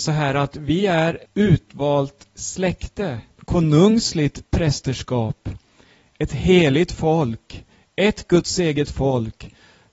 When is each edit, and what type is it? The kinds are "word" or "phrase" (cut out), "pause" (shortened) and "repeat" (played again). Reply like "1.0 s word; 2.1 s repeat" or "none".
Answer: 1.2 s word; 3.4 s word